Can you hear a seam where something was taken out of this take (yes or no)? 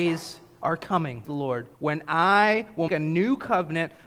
yes